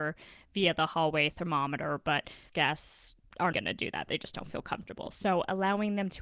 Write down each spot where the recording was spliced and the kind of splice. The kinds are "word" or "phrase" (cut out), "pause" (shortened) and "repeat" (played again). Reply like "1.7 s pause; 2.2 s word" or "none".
2.5 s word; 3.5 s word